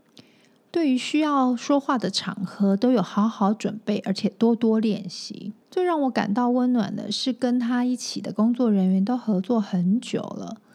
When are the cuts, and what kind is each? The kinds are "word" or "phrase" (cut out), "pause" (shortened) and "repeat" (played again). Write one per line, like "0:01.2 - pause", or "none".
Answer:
0:05.6 - pause